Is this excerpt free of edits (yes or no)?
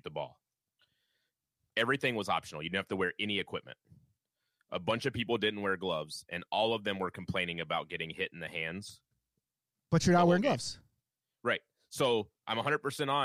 yes